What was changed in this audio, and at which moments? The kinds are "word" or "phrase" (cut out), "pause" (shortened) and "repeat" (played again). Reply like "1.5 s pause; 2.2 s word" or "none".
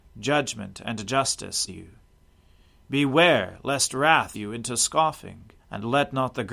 1.7 s word; 4.3 s word; 5.6 s pause